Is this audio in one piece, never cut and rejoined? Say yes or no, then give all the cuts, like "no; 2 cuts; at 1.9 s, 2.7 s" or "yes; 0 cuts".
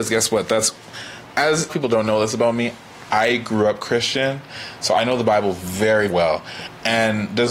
no; 2 cuts; at 1.7 s, 6.1 s